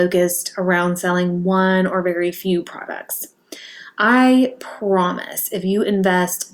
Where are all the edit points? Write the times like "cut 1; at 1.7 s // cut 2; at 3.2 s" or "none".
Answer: none